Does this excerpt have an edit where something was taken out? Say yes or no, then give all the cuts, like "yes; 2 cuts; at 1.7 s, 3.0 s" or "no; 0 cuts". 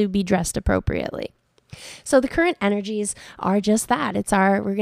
no; 0 cuts